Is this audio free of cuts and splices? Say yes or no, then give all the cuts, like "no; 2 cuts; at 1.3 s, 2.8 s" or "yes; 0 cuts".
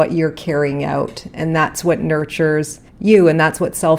no; 1 cut; at 2.9 s